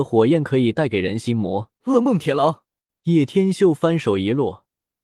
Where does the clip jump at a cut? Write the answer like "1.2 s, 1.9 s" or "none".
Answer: 1.8 s, 2.9 s